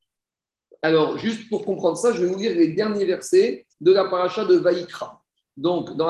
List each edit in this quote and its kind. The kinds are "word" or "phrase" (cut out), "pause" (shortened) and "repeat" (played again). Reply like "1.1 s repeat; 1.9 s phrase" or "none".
3.7 s pause